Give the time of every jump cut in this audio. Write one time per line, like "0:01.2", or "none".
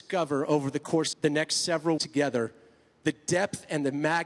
0:01.1
0:02.0